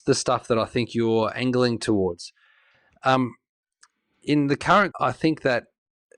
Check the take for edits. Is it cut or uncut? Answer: cut